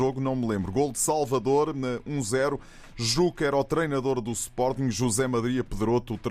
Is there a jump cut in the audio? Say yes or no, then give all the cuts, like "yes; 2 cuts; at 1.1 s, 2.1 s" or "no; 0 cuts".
no; 0 cuts